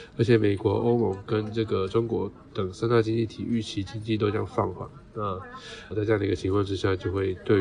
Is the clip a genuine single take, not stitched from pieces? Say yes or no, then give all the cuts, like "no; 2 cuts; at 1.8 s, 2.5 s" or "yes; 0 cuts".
no; 1 cut; at 5.9 s